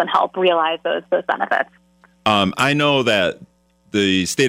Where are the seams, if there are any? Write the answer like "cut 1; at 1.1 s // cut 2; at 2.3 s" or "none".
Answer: cut 1; at 2.5 s